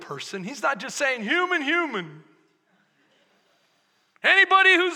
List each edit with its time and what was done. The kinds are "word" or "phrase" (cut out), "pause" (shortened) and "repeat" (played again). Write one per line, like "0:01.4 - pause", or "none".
none